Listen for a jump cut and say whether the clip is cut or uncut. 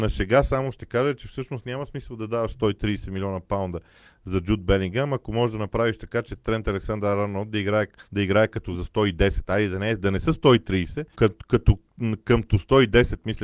cut